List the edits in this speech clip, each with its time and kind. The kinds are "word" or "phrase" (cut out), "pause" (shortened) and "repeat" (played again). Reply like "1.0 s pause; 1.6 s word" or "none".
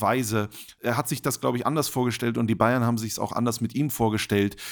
none

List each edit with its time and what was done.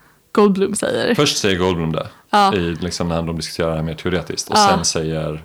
none

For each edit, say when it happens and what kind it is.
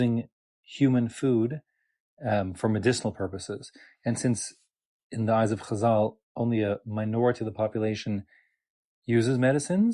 none

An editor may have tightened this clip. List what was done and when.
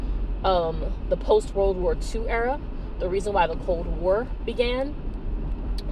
none

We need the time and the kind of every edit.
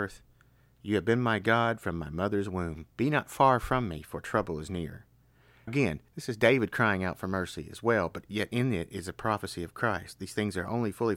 2.9 s pause; 5.7 s word; 6.1 s pause

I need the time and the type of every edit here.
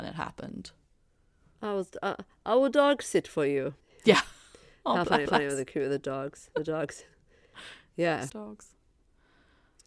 3.8 s pause; 5.3 s repeat; 8.3 s phrase

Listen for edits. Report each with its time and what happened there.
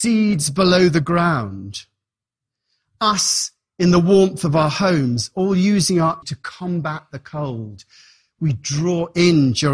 6.2 s word

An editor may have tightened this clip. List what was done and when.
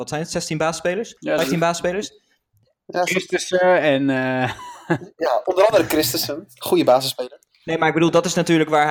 1.2 s pause

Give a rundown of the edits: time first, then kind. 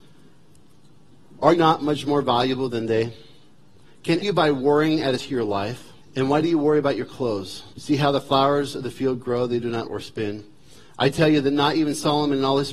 1.6 s word; 4.2 s phrase; 5.2 s phrase; 6.0 s pause; 7.7 s pause; 9.9 s word

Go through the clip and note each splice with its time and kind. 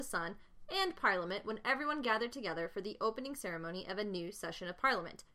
none

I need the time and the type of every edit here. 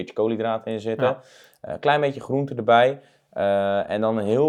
none

